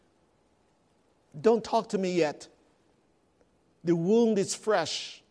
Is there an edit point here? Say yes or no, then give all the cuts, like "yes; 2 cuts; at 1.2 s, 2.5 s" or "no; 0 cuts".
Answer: no; 0 cuts